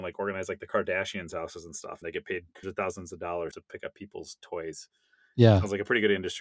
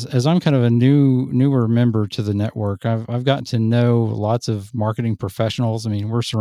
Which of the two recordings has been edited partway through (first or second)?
first